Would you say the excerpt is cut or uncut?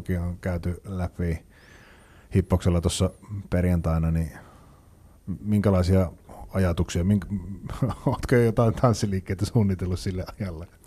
uncut